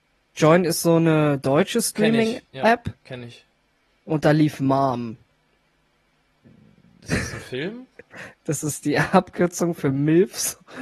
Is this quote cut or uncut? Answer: uncut